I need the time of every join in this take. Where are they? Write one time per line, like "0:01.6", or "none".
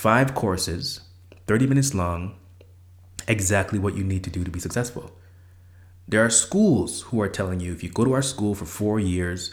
none